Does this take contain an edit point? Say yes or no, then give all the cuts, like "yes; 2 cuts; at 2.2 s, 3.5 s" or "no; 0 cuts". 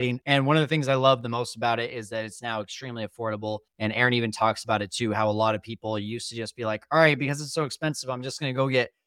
yes; 1 cut; at 3.7 s